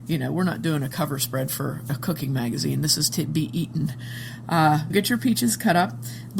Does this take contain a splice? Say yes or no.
yes